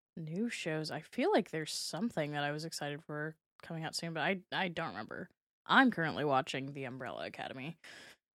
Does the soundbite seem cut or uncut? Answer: uncut